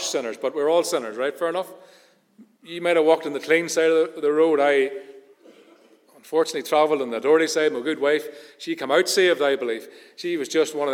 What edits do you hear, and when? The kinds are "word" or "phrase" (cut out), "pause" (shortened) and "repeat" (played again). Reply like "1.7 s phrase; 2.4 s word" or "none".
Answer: none

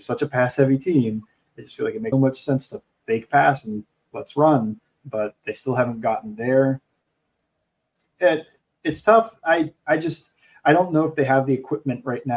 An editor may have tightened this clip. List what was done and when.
2.1 s word

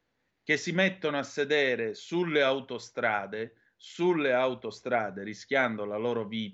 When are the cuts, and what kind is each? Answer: none

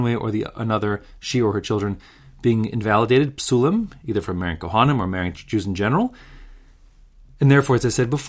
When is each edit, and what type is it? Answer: none

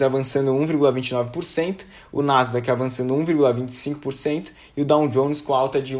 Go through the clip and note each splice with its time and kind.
none

